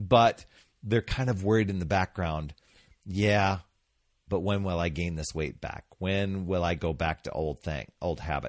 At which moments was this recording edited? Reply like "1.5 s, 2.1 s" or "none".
none